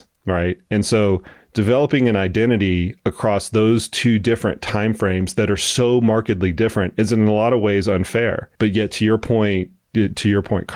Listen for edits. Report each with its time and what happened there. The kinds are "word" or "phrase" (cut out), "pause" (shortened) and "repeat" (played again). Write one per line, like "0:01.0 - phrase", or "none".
0:08.5 - pause